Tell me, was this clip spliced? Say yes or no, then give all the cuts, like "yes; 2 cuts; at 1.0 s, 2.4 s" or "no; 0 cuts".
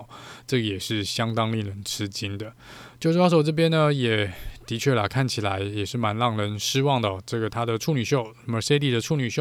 no; 0 cuts